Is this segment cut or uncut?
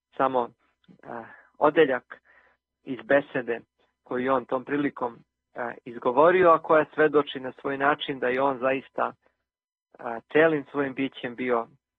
uncut